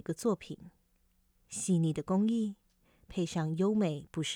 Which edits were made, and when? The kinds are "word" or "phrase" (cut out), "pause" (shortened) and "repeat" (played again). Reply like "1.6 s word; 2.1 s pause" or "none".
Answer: none

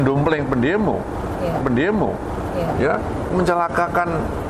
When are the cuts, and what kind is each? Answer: 1.6 s repeat; 3.3 s word

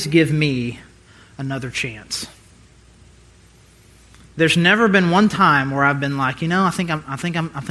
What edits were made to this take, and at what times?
none

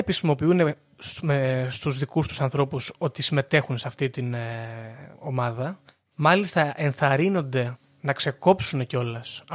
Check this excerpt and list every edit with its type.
5.1 s pause

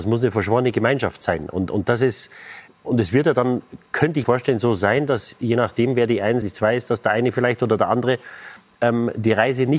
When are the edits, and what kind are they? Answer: 2.7 s word; 4.2 s word; 6.4 s word

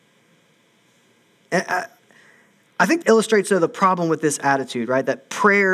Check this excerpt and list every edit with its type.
3.0 s word

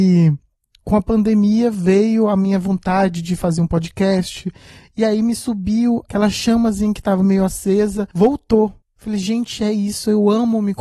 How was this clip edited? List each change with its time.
none

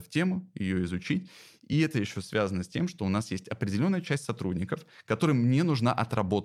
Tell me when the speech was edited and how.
none

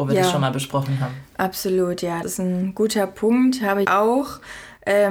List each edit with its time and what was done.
2.2 s word; 3.8 s word

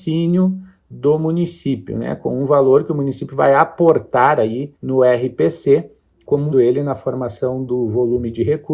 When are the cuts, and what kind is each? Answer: 4.8 s pause; 6.5 s phrase

